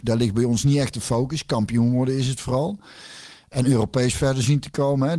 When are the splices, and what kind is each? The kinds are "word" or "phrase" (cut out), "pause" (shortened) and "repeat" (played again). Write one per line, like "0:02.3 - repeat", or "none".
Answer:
none